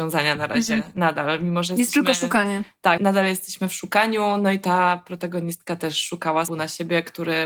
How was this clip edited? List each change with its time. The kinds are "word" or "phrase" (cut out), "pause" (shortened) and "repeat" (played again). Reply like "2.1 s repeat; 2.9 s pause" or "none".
3.0 s word; 6.5 s word